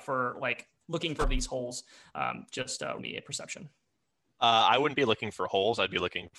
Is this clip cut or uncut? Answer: cut